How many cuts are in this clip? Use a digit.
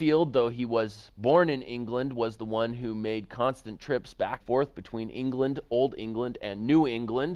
1